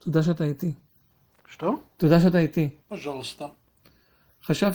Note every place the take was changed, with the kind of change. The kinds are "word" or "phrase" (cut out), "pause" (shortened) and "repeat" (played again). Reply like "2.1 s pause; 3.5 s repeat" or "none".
2.8 s pause